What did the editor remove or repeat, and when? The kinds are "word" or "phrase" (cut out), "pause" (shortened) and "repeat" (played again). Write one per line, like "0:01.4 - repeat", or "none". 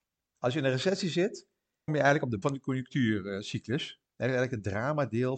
0:01.9 - phrase
0:02.4 - word
0:04.1 - pause